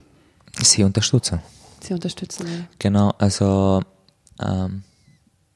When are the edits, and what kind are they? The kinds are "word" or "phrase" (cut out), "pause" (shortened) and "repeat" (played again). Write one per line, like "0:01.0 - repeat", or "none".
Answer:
none